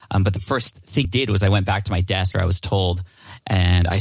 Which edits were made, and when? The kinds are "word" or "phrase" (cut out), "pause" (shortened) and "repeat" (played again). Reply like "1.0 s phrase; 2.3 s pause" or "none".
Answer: 1.0 s word; 2.3 s word